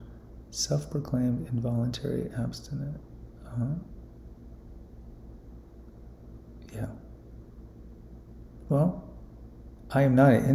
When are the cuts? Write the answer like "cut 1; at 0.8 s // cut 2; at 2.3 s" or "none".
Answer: none